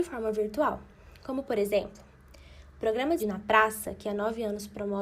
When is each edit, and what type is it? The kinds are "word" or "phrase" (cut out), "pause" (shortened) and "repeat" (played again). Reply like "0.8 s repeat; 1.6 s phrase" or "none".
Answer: 3.2 s word